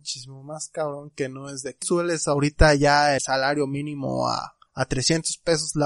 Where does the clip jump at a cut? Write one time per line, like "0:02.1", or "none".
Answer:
0:01.8
0:03.2
0:04.7